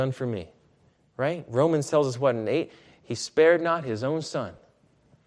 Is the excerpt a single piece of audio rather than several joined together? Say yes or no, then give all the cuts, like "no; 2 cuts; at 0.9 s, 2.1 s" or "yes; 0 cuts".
yes; 0 cuts